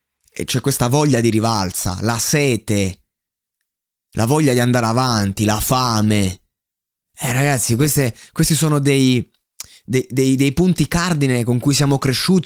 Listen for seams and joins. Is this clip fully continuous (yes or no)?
yes